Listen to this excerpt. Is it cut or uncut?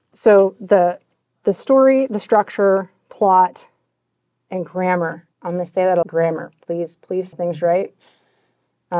cut